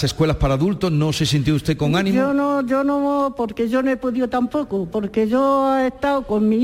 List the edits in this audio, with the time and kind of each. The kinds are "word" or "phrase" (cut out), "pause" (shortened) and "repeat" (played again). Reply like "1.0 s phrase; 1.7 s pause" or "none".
none